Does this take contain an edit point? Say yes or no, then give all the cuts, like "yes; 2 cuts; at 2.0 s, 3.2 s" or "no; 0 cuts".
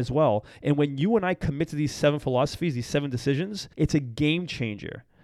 yes; 1 cut; at 3.7 s